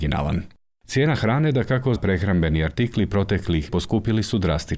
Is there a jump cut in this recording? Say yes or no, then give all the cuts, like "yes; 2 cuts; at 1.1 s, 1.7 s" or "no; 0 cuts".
yes; 2 cuts; at 2.0 s, 3.7 s